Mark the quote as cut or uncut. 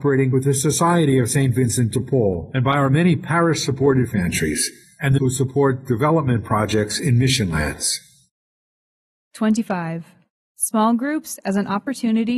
cut